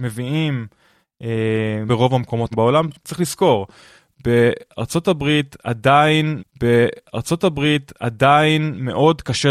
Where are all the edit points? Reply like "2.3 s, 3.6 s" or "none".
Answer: 1.9 s, 2.5 s, 6.4 s